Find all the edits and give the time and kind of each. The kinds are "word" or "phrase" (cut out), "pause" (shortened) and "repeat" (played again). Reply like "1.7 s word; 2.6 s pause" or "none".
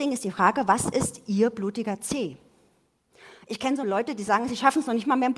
3.8 s word